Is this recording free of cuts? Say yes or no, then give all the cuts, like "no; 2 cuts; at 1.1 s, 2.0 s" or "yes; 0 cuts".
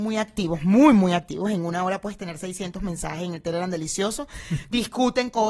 yes; 0 cuts